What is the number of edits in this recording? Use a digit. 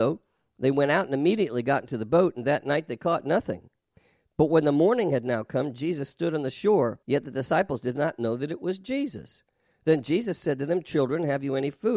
1